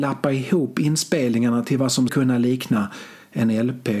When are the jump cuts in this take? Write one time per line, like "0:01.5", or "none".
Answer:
0:02.1